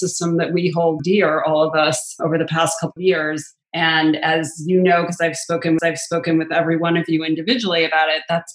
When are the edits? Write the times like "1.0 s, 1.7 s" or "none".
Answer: 1.0 s, 3.0 s, 5.8 s